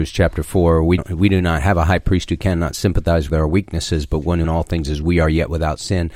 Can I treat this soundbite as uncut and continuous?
no; 3 cuts; at 1.0 s, 3.3 s, 4.4 s

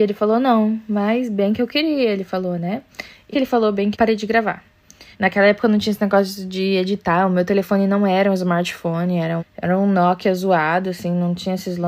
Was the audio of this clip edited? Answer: yes; 4 cuts; at 3.3 s, 3.9 s, 5.1 s, 9.4 s

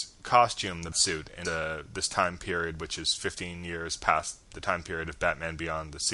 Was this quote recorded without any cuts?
no; 2 cuts; at 0.9 s, 1.4 s

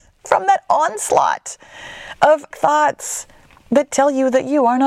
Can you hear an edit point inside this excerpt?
yes; 1 cut; at 2.5 s

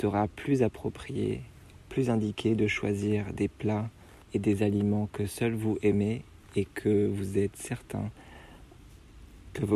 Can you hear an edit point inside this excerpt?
yes; 1 cut; at 4.2 s

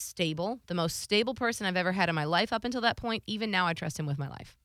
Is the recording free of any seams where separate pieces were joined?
yes; 0 cuts

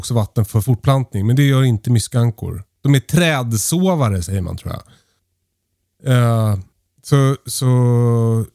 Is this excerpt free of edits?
yes; 0 cuts

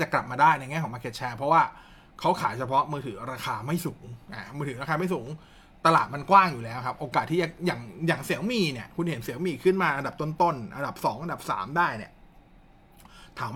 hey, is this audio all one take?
yes; 0 cuts

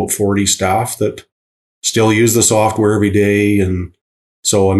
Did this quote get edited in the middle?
no; 0 cuts

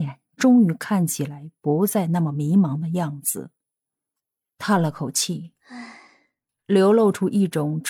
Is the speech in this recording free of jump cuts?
yes; 0 cuts

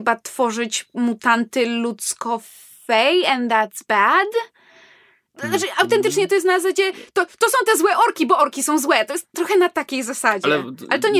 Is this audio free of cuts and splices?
yes; 0 cuts

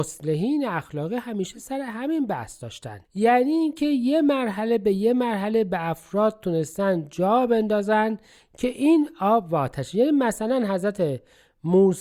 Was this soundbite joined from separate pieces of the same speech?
yes; 1 cut; at 3.0 s

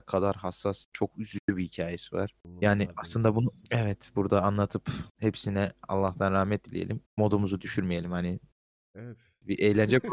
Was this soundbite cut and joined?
yes; 2 cuts; at 5.1 s, 7.1 s

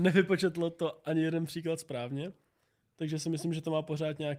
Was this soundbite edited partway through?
no; 0 cuts

